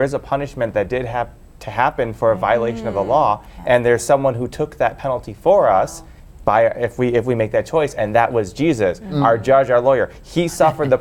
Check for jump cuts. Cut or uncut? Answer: uncut